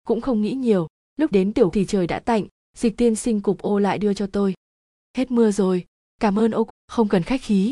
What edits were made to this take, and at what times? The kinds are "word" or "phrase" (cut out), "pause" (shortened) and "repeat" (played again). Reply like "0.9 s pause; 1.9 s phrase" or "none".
1.3 s word; 1.7 s word; 6.7 s word